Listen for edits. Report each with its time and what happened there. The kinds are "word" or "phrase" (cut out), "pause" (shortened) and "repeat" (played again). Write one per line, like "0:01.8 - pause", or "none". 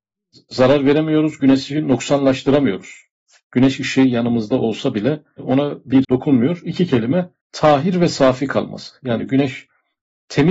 0:06.0 - word
0:07.4 - pause